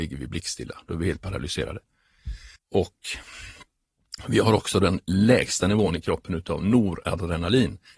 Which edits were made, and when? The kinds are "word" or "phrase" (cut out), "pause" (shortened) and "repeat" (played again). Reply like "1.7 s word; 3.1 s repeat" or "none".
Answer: 2.6 s pause